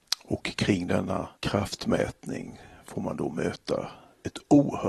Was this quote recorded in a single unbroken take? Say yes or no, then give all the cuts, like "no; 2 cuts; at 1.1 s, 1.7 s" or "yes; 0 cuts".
no; 1 cut; at 1.4 s